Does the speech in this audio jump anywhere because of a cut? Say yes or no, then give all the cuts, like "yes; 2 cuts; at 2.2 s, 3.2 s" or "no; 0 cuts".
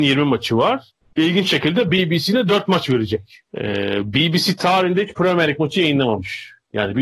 yes; 2 cuts; at 1.0 s, 3.5 s